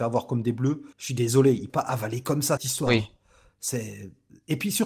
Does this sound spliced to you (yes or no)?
yes